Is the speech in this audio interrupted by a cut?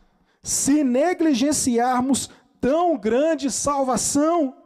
no; 0 cuts

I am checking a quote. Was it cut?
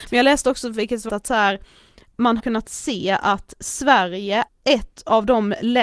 yes; 3 cuts; at 1.1 s, 2.4 s, 4.5 s

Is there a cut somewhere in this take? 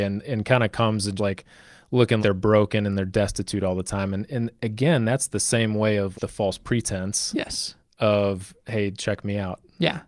yes; 3 cuts; at 1.2 s, 2.2 s, 6.1 s

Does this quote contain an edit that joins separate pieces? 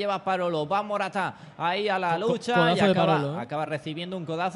no; 0 cuts

